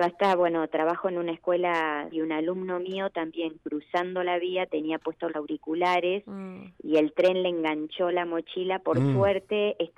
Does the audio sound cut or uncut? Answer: cut